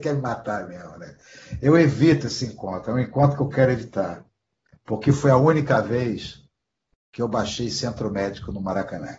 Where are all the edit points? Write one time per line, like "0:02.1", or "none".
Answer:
none